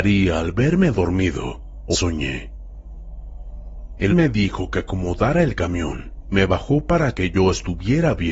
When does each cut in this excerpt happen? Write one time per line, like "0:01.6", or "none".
0:01.9
0:04.1
0:06.3
0:07.1